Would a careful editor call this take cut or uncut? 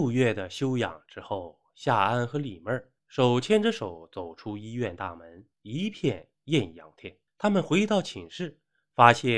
cut